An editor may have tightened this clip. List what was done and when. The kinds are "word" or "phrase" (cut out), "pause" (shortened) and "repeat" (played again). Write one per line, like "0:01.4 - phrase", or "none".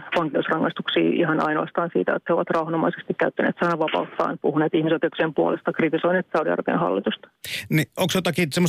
none